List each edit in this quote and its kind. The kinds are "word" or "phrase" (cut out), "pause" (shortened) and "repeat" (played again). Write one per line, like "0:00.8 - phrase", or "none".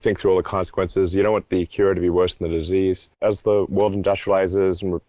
0:03.1 - pause